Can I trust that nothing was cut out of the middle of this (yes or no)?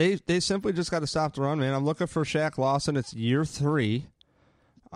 yes